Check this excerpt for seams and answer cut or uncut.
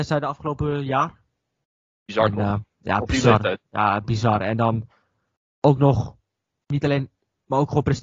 uncut